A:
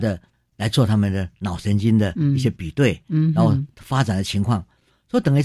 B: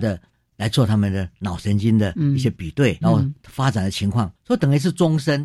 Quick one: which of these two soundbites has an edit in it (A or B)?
B